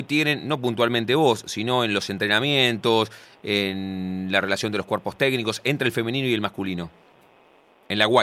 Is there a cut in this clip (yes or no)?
no